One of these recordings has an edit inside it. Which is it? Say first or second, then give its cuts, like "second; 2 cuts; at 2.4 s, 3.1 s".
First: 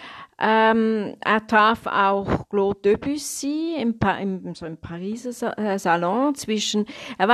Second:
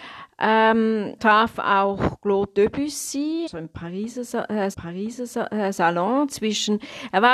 second; 3 cuts; at 1.2 s, 3.5 s, 4.7 s